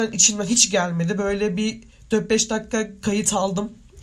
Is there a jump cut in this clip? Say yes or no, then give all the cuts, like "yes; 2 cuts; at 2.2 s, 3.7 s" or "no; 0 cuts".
no; 0 cuts